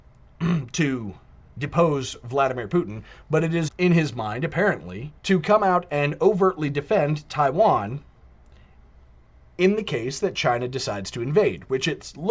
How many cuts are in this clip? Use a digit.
3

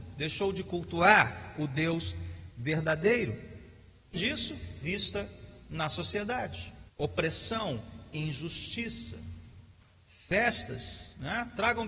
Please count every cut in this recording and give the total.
3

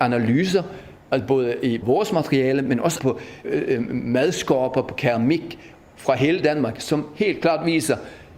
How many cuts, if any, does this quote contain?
3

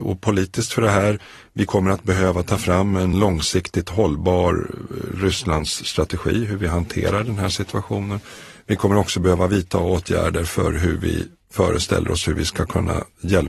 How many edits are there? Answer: 0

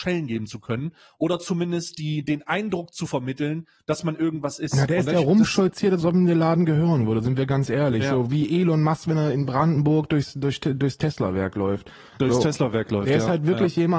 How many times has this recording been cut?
0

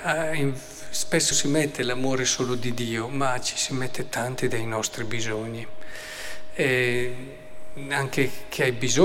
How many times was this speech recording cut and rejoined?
1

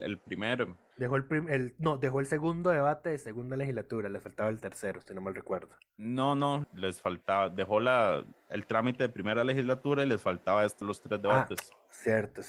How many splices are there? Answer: 3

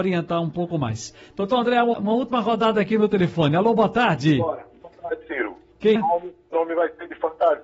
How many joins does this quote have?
3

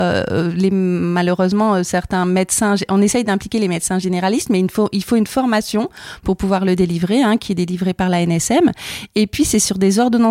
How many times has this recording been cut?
0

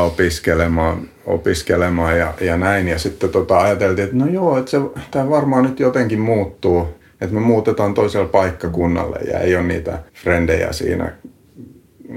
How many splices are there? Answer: 2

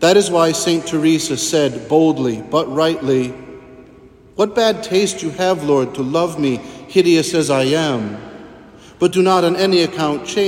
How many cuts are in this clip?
0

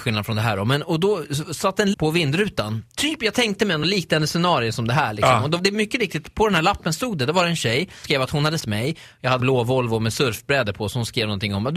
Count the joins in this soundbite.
5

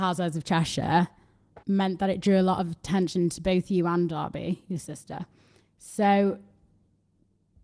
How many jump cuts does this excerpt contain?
1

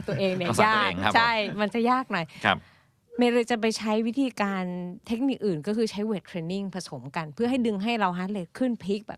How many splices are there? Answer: 0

